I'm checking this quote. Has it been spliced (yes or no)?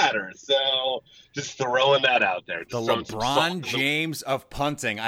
no